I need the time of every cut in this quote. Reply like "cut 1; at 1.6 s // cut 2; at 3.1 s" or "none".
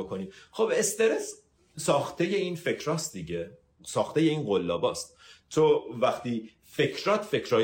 none

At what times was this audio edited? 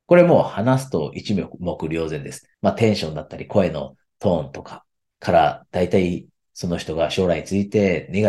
cut 1; at 2.5 s // cut 2; at 5.1 s

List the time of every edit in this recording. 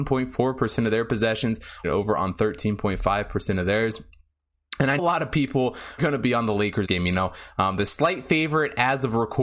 cut 1; at 1.8 s // cut 2; at 5.0 s // cut 3; at 6.0 s // cut 4; at 6.8 s

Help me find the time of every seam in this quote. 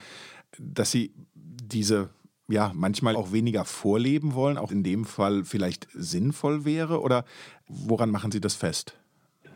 cut 1; at 3.1 s // cut 2; at 4.7 s

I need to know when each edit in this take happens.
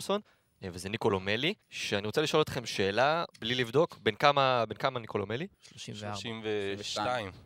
cut 1; at 1.6 s // cut 2; at 3.3 s // cut 3; at 5.5 s

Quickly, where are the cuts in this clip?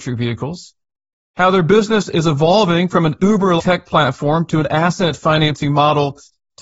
cut 1; at 3.6 s

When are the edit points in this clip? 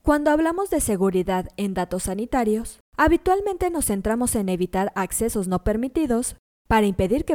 cut 1; at 2.8 s

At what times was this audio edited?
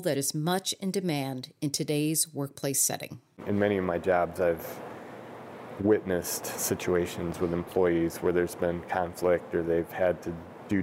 none

